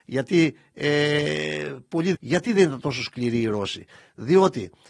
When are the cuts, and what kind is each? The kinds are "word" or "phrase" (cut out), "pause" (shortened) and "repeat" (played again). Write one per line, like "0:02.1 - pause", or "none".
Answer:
0:02.1 - word